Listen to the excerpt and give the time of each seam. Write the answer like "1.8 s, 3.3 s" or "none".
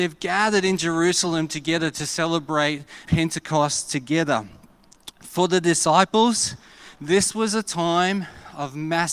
3.0 s